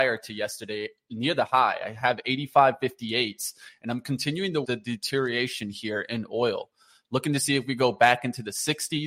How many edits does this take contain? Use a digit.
1